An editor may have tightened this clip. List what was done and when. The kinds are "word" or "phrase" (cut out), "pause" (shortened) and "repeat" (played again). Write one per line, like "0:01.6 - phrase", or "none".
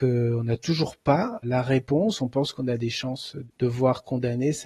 none